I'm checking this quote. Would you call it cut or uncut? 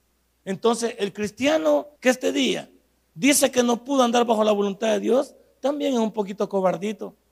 cut